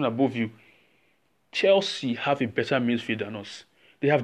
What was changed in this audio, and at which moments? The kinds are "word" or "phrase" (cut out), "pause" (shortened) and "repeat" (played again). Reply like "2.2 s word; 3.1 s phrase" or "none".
none